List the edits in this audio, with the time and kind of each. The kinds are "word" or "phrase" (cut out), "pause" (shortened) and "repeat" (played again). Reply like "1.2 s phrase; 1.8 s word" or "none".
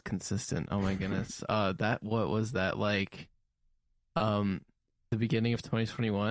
none